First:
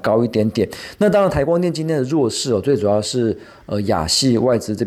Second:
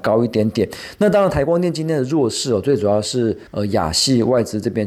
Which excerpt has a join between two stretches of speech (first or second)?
second